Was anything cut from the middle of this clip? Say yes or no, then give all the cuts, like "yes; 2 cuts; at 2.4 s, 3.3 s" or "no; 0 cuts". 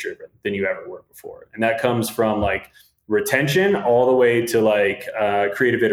no; 0 cuts